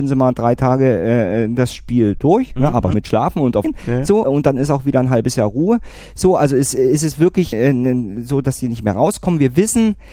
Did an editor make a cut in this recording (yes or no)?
yes